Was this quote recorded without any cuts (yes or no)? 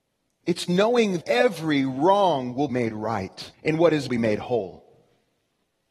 no